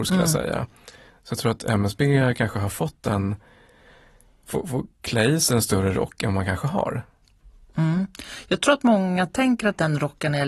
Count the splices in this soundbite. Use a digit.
1